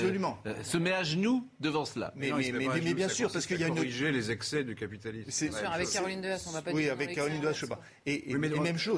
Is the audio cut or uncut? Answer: uncut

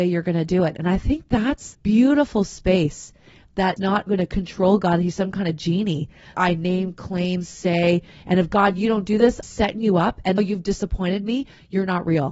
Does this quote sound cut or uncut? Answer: cut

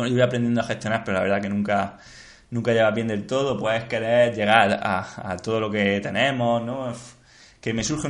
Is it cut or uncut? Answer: uncut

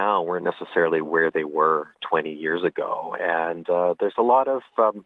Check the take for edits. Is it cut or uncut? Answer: uncut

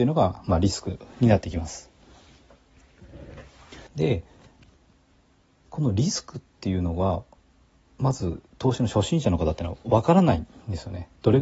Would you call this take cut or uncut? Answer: cut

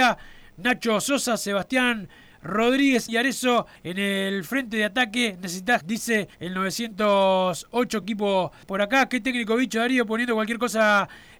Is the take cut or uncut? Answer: cut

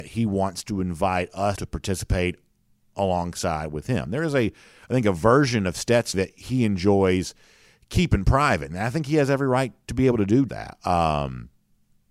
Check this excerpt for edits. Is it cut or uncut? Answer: cut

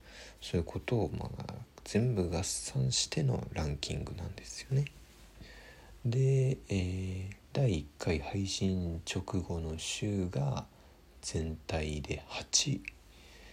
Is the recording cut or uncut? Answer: cut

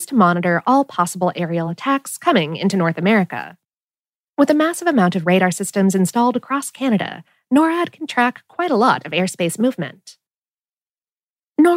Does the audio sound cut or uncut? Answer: uncut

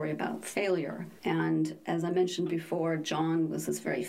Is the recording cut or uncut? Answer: cut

